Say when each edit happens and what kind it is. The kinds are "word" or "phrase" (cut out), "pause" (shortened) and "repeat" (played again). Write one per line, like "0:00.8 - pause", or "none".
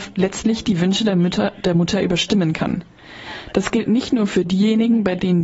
none

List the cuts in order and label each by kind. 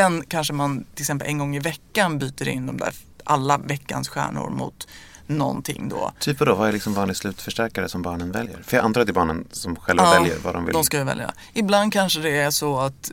none

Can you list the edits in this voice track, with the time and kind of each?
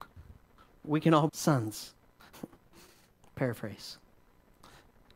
0:01.3 - word

